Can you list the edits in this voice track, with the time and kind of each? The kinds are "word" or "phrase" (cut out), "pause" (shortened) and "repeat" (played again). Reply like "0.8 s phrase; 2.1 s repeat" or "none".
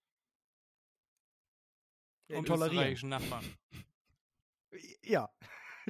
2.4 s phrase